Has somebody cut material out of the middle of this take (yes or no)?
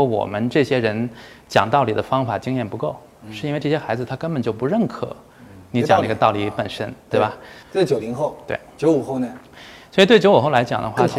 no